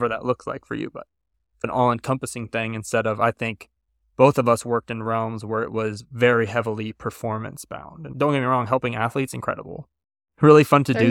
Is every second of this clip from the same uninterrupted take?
yes; 0 cuts

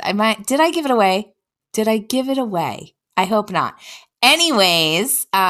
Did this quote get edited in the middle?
no; 0 cuts

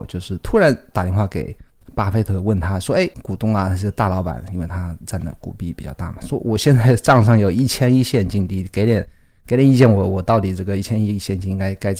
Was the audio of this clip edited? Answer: no; 0 cuts

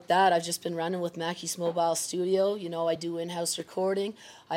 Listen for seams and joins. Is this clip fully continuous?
yes; 0 cuts

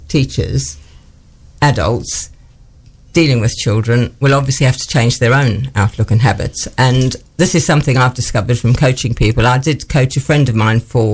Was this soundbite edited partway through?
no; 0 cuts

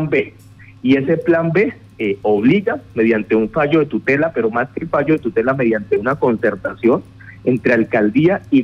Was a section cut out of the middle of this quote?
no; 0 cuts

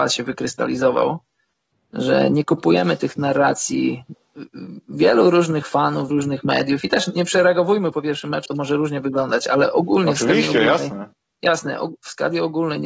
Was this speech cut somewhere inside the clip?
yes; 2 cuts; at 6.1 s, 8.5 s

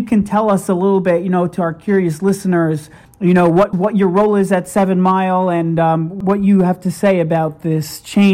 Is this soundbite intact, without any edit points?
yes; 0 cuts

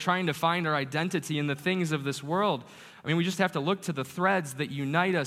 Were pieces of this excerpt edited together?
no; 0 cuts

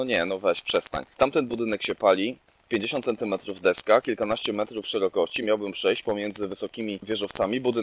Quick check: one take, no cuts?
yes; 0 cuts

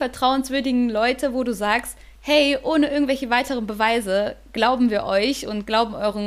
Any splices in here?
no; 0 cuts

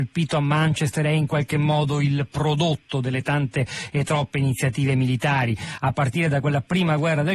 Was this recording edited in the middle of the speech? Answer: no; 0 cuts

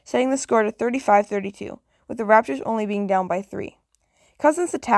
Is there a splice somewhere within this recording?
no; 0 cuts

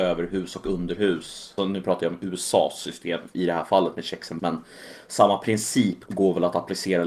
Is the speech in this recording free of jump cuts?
no; 4 cuts; at 1.6 s, 3.3 s, 4.4 s, 6.1 s

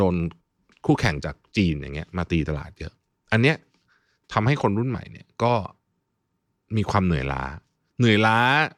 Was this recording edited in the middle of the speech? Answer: no; 0 cuts

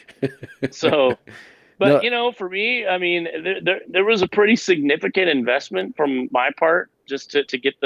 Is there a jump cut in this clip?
no; 0 cuts

